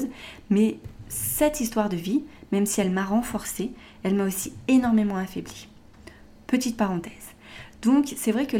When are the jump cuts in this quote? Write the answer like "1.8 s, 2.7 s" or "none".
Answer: none